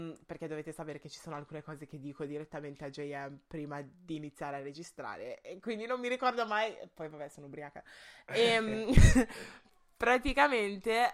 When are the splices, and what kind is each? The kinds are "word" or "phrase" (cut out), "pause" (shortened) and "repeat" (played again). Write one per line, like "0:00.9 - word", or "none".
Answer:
none